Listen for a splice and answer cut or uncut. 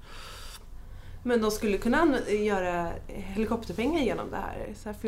uncut